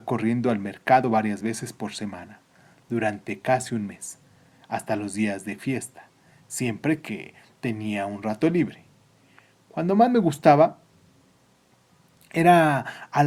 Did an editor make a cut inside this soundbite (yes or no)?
no